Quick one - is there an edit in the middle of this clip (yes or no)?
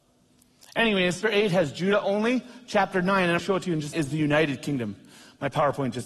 yes